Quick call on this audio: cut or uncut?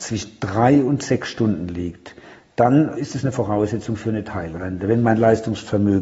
cut